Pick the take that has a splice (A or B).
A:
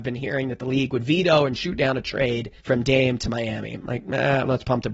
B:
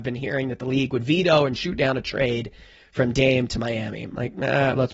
A